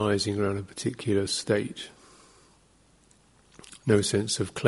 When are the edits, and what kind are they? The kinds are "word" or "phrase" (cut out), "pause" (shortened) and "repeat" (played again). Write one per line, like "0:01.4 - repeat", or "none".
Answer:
none